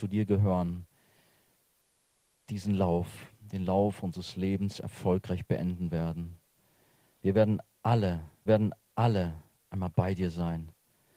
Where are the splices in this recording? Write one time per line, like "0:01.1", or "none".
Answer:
0:08.5

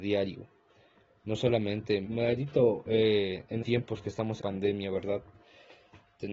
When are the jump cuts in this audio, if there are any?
0:02.0
0:03.6
0:04.4

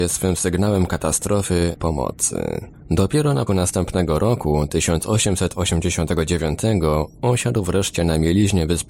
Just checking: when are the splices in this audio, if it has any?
0:01.8
0:03.5

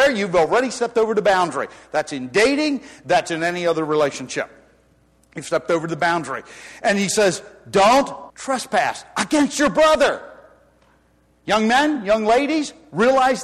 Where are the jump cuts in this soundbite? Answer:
0:08.3

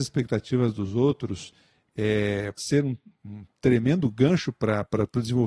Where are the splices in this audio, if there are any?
0:02.6

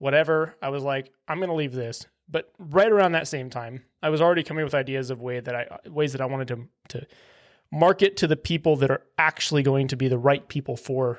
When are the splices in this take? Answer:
none

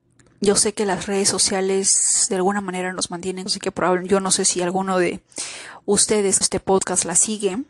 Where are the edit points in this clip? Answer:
0:03.5
0:06.4

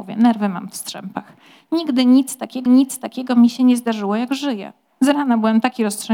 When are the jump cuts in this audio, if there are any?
0:02.7

